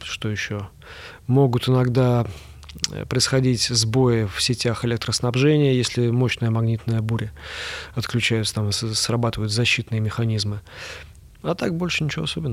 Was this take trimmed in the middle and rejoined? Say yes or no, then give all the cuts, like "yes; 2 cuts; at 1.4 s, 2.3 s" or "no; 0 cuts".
no; 0 cuts